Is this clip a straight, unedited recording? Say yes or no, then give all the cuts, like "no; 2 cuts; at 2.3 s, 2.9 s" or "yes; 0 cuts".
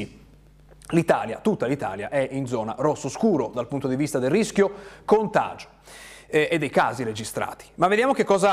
yes; 0 cuts